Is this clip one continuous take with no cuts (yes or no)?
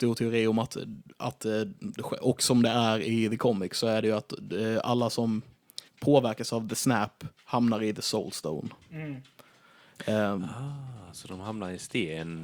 no